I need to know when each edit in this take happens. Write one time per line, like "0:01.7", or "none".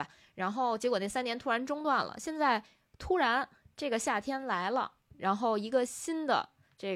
none